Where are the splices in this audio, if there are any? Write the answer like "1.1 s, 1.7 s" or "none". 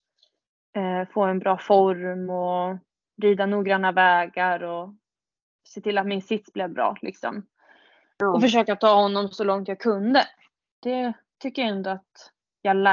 none